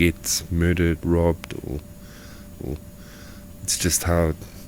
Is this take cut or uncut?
cut